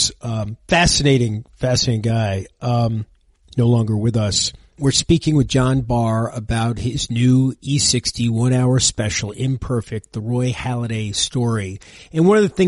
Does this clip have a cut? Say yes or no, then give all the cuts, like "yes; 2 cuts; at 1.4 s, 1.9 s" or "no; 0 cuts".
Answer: no; 0 cuts